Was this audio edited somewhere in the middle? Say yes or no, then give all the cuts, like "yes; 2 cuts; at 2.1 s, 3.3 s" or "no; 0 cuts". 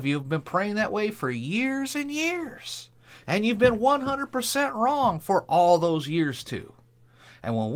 no; 0 cuts